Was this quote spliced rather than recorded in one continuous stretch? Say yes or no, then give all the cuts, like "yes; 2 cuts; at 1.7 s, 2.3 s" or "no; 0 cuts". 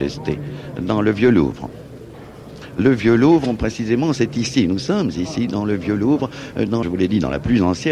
yes; 1 cut; at 6.8 s